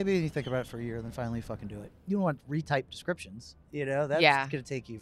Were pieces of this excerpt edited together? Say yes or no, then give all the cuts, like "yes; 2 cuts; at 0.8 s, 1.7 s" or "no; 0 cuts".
no; 0 cuts